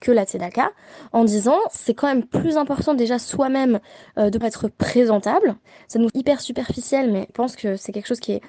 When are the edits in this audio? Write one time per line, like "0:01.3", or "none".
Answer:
0:04.4
0:06.1
0:07.3